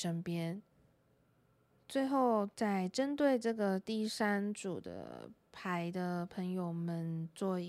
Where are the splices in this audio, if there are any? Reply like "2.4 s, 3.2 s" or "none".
2.5 s